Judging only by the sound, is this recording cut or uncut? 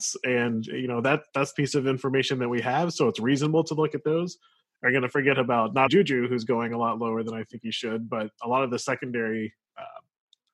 cut